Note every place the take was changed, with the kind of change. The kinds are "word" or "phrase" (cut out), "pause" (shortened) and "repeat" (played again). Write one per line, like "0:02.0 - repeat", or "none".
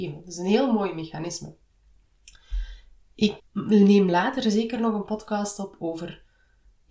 0:03.4 - word